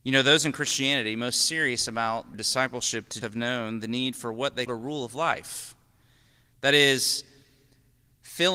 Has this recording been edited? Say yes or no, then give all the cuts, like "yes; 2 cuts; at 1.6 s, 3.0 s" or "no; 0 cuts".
yes; 3 cuts; at 2.3 s, 3.2 s, 4.7 s